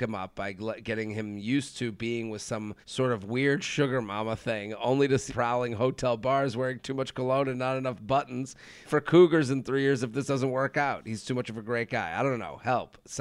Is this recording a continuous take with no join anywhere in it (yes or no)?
no